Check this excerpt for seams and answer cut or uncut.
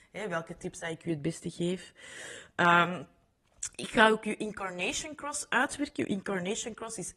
uncut